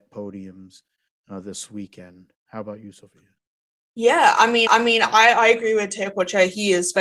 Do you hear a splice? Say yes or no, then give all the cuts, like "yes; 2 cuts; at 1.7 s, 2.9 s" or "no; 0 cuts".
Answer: yes; 1 cut; at 4.7 s